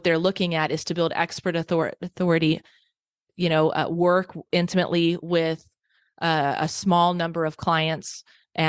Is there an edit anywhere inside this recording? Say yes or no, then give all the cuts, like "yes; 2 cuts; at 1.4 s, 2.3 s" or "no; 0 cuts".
no; 0 cuts